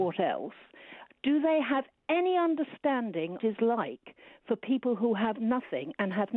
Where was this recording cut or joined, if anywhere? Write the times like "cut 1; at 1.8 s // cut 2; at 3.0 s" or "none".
cut 1; at 3.4 s